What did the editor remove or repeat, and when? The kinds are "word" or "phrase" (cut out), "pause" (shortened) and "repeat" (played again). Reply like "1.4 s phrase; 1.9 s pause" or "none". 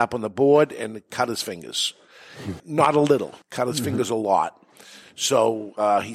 2.6 s word; 3.4 s pause

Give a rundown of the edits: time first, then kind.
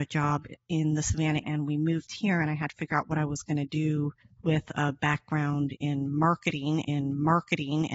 1.4 s word; 4.2 s pause; 6.8 s repeat

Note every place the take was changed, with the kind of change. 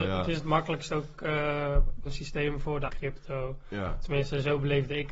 2.1 s word; 2.9 s word

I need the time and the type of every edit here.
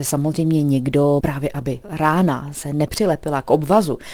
1.2 s phrase; 1.8 s word

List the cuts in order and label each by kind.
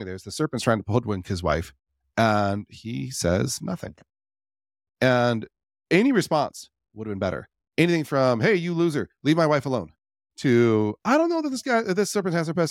none

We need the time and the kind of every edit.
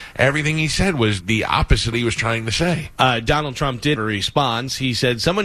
1.2 s word; 1.9 s phrase; 4.0 s word

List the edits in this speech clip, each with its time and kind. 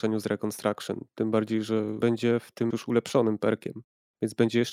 2.0 s word; 2.7 s word

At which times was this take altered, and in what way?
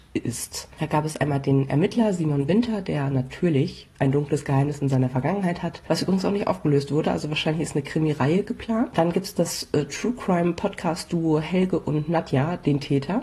none

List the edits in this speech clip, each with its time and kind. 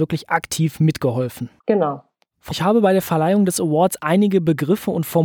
1.6 s pause; 2.5 s word

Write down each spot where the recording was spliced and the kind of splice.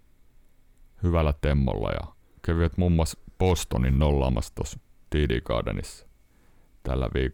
none

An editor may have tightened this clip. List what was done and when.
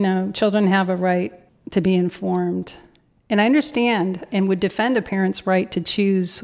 1.5 s pause

